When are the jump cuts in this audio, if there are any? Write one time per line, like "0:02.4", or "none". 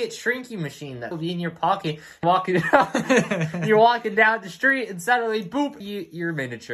0:01.1
0:02.2
0:05.8